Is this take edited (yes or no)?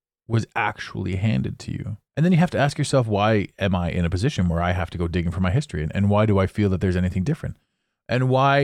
yes